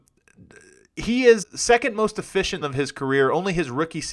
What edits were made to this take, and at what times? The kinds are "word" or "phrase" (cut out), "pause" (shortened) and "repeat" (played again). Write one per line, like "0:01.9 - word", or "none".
0:01.4 - word
0:02.6 - word